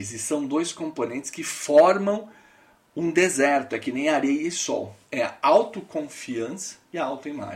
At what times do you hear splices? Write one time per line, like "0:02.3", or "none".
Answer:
none